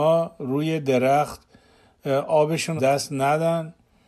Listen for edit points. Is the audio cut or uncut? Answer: cut